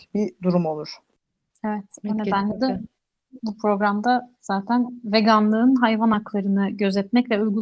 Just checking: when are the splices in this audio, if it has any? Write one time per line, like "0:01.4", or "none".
none